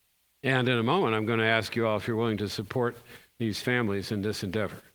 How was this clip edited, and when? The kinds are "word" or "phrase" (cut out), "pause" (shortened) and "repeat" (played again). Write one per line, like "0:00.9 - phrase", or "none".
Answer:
none